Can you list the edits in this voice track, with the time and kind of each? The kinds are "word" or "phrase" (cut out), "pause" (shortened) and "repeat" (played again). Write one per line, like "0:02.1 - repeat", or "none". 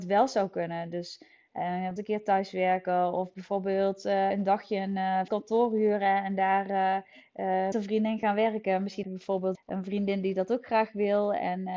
0:02.0 - word
0:04.3 - word
0:05.3 - word
0:07.7 - word
0:09.0 - word
0:09.5 - word